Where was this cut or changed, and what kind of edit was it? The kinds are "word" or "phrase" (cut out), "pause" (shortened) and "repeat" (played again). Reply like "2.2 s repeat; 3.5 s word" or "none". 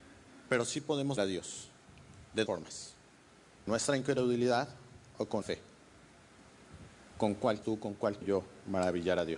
1.2 s word; 2.5 s word; 3.7 s word; 5.4 s word; 7.6 s word; 8.2 s word